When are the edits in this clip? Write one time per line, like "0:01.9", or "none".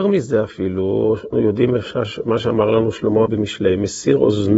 0:01.3
0:03.3

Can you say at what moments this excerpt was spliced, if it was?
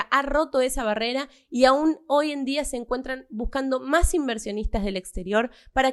none

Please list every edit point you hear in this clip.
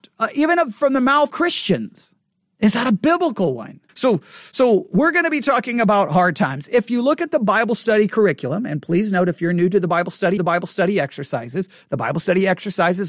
0:01.3
0:03.9
0:10.4

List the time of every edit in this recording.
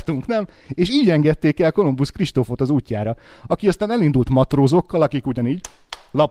none

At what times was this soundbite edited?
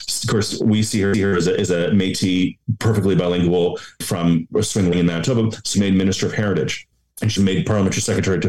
0:01.1
0:04.0
0:04.9
0:05.7
0:06.9
0:07.4

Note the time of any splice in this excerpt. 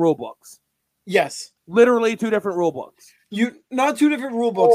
0:01.6

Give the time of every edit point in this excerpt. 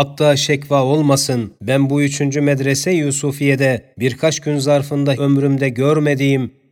0:01.6
0:03.9
0:05.1

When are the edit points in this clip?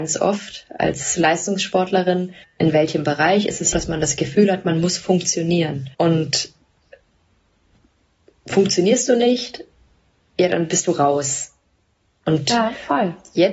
0:02.4
0:03.7
0:05.9

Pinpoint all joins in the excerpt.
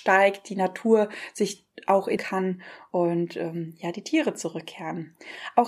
0:02.2

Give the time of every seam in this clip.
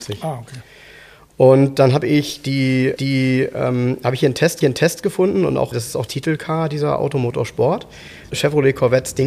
0:03.0
0:04.6
0:05.7
0:06.1
0:08.3

